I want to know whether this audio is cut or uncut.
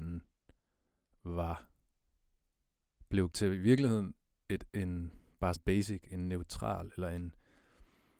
cut